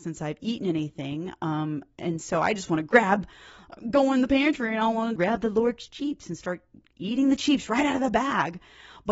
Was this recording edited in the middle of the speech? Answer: yes; 1 cut; at 5.2 s

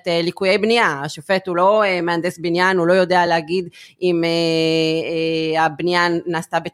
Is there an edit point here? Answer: no; 0 cuts

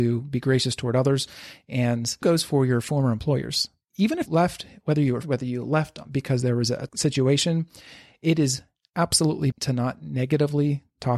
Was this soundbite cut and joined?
yes; 5 cuts; at 2.2 s, 4.3 s, 5.2 s, 6.9 s, 9.5 s

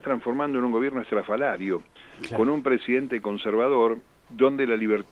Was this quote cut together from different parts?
yes; 1 cut; at 4.2 s

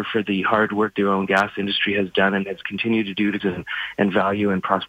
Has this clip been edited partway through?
yes; 3 cuts; at 0.9 s, 2.6 s, 3.4 s

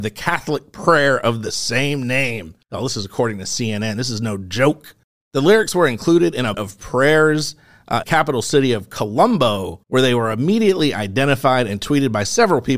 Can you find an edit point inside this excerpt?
yes; 5 cuts; at 2.6 s, 5.0 s, 6.5 s, 8.0 s, 9.8 s

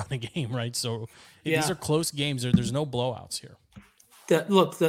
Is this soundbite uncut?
yes; 0 cuts

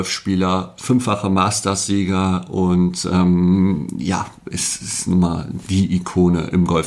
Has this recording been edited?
no; 0 cuts

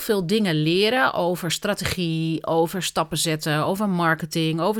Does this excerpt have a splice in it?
no; 0 cuts

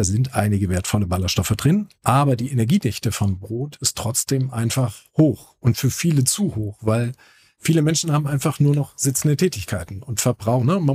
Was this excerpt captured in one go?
yes; 0 cuts

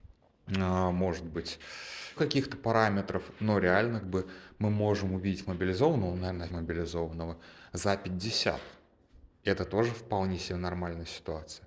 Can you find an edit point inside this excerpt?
yes; 4 cuts; at 2.2 s, 4.0 s, 6.5 s, 9.3 s

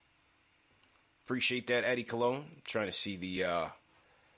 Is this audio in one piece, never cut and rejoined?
yes; 0 cuts

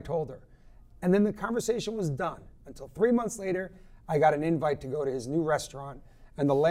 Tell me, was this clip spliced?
no; 0 cuts

